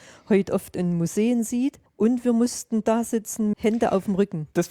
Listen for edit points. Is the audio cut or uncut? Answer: cut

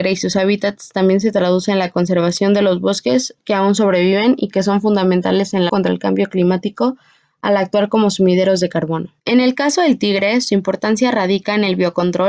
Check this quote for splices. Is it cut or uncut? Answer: cut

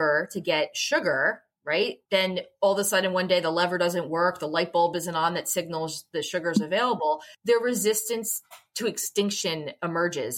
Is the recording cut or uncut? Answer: cut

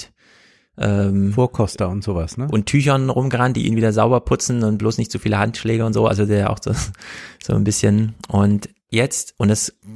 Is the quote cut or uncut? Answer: uncut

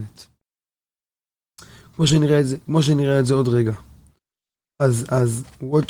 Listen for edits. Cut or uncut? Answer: uncut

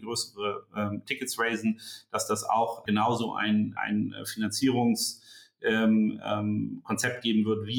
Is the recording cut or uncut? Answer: cut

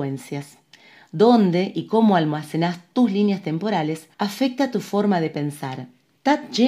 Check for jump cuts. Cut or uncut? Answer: cut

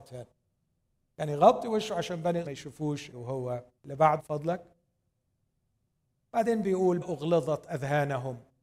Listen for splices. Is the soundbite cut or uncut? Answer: cut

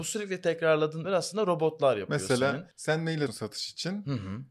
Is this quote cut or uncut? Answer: cut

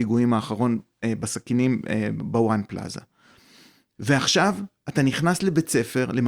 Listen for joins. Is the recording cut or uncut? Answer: uncut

